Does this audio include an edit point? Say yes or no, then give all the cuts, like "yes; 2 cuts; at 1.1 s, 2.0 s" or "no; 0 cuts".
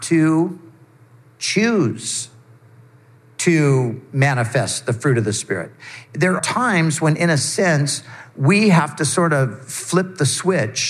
yes; 1 cut; at 6.4 s